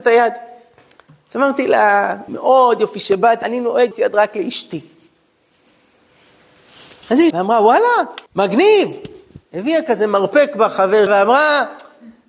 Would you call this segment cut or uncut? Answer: cut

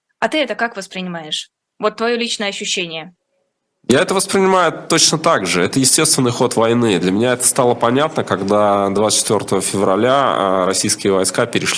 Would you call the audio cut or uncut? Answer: uncut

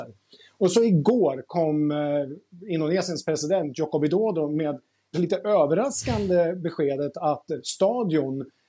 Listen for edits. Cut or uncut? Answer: cut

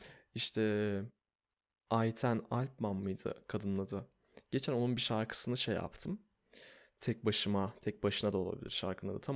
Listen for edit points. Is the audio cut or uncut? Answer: uncut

